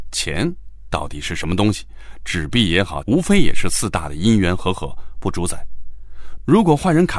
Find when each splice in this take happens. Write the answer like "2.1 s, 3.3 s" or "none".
3.0 s, 5.1 s